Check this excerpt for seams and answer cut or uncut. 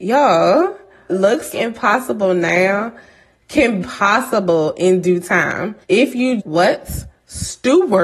cut